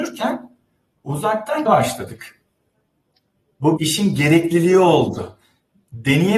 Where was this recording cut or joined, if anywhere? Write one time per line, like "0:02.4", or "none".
0:01.7
0:03.8